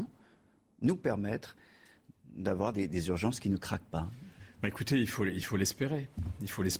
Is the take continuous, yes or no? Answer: yes